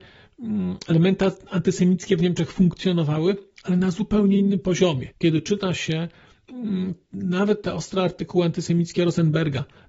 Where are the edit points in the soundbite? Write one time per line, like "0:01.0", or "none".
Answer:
0:05.1